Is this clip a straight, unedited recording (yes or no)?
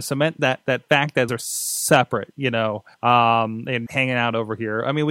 no